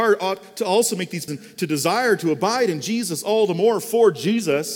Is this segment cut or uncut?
cut